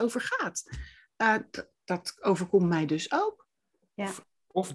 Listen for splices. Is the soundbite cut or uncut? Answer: uncut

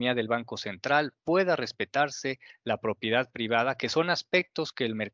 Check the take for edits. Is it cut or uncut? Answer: uncut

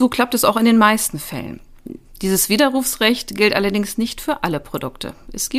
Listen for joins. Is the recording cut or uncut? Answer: uncut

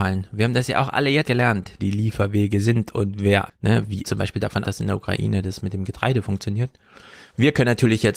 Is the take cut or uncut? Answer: cut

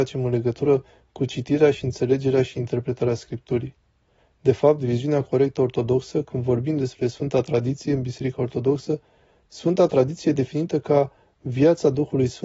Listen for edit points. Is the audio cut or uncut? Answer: uncut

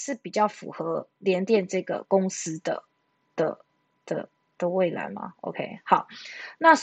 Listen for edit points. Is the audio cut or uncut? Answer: uncut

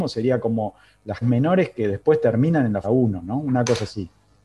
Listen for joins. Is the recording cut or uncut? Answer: cut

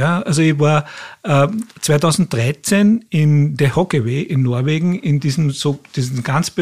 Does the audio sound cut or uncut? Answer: uncut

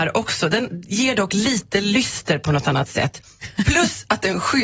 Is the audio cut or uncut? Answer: uncut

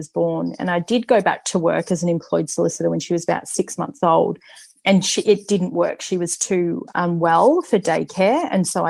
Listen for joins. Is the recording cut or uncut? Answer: uncut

